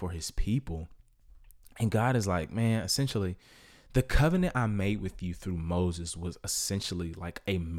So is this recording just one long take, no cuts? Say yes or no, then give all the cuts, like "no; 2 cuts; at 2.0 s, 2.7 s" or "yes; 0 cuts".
yes; 0 cuts